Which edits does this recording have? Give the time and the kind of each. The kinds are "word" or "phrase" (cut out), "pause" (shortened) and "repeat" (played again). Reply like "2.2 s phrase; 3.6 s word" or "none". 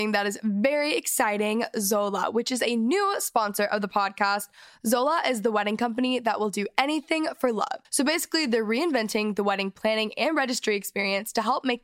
7.8 s pause